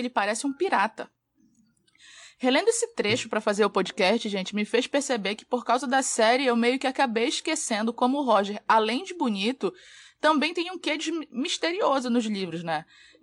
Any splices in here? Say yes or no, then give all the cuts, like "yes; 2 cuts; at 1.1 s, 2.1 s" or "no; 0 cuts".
no; 0 cuts